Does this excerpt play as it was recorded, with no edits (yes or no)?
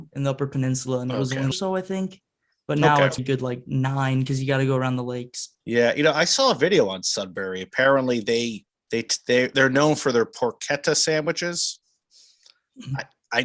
no